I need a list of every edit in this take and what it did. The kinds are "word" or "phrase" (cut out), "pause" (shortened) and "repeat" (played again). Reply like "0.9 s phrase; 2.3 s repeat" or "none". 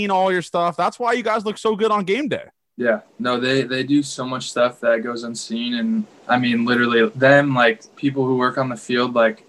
2.7 s pause; 6.1 s pause